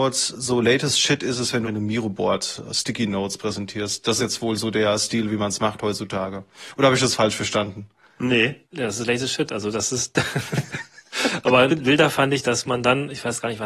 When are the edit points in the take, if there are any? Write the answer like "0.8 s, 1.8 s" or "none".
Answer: 1.6 s, 4.2 s, 11.7 s